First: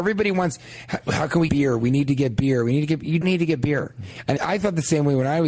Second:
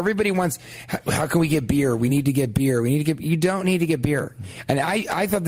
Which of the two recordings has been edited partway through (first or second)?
first